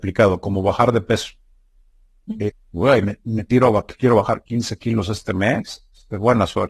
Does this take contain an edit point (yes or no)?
yes